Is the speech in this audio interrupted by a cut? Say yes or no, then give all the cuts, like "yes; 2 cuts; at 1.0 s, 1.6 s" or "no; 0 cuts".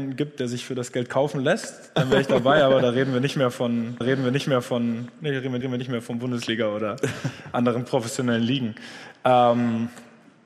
yes; 2 cuts; at 4.0 s, 5.6 s